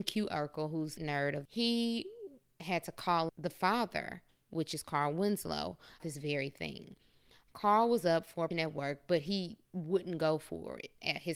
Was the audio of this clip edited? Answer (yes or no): yes